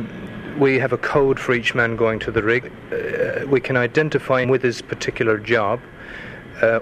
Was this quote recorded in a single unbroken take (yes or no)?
no